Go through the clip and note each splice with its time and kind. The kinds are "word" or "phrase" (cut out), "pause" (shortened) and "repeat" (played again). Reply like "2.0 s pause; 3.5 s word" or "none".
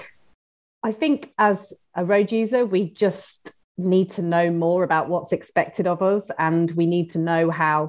none